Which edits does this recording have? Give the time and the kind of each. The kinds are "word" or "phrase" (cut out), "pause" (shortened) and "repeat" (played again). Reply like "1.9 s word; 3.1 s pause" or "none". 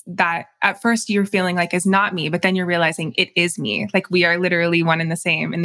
none